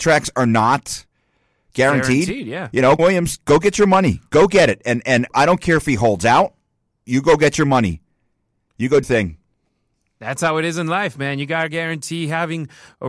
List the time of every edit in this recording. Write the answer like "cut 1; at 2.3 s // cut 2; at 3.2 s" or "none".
cut 1; at 3.0 s // cut 2; at 5.3 s // cut 3; at 9.0 s